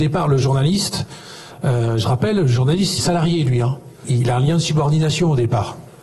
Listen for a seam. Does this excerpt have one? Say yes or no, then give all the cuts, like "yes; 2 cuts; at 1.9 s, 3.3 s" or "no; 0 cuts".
yes; 2 cuts; at 3.0 s, 4.0 s